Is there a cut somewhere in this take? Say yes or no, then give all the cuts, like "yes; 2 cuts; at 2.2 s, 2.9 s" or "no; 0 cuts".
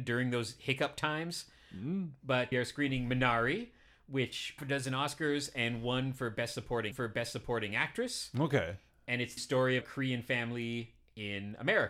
yes; 5 cuts; at 2.5 s, 4.6 s, 6.9 s, 9.4 s, 9.8 s